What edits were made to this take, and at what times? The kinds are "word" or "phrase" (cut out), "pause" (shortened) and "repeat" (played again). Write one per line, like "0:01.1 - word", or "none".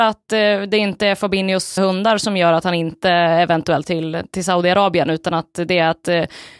0:01.8 - word
0:03.8 - word